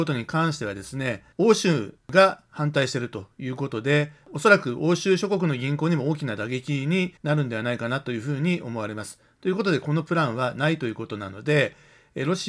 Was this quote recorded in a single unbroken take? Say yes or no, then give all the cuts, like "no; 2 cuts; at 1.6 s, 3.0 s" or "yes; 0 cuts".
no; 2 cuts; at 1.3 s, 7.2 s